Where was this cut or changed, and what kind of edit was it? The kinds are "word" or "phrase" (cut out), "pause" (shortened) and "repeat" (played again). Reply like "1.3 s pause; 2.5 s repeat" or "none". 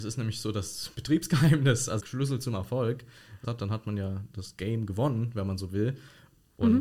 2.0 s phrase; 3.4 s phrase